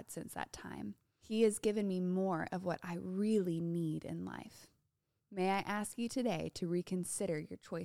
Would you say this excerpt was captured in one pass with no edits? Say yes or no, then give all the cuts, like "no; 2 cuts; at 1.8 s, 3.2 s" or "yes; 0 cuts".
yes; 0 cuts